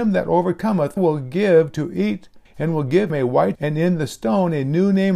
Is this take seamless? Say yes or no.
no